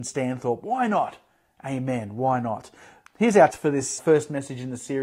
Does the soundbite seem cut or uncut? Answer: cut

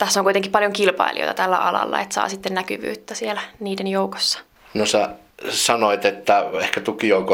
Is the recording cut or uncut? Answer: uncut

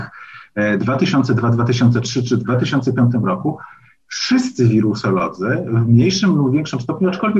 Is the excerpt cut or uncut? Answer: uncut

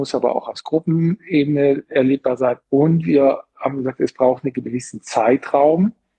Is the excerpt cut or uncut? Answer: uncut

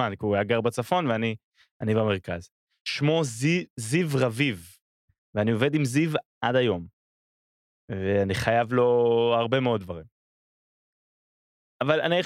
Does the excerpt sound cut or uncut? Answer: uncut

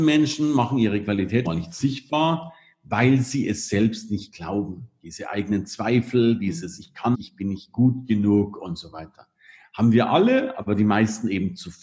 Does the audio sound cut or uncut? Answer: cut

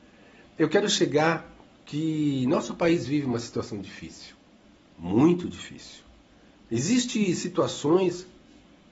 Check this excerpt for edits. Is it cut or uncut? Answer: uncut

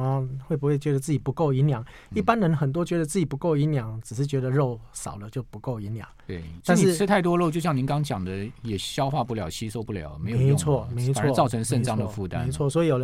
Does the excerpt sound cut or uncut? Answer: cut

